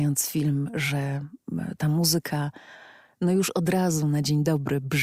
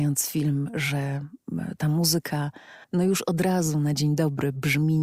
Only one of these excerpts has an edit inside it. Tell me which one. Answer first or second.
second